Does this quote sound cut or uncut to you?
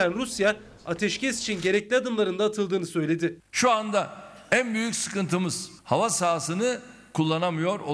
cut